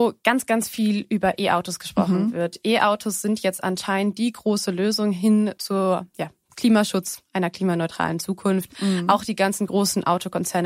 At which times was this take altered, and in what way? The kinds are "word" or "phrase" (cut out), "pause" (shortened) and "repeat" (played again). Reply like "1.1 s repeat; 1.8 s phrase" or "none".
none